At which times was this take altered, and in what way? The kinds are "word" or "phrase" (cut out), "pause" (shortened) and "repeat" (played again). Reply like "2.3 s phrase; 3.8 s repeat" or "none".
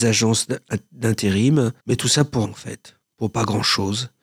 1.8 s pause; 2.4 s word